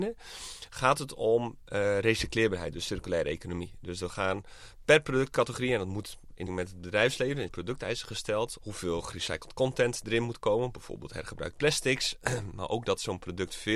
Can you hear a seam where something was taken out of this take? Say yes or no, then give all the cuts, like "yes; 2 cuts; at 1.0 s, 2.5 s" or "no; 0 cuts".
yes; 3 cuts; at 6.5 s, 7.5 s, 8.6 s